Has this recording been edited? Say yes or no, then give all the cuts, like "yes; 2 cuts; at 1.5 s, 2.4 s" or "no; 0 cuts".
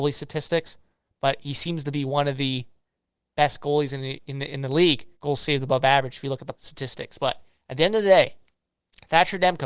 yes; 2 cuts; at 5.1 s, 6.5 s